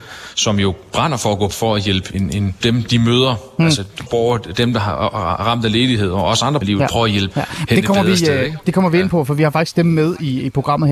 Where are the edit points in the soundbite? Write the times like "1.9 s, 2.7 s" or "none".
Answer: 1.5 s, 2.1 s, 2.6 s, 4.1 s, 6.6 s, 7.3 s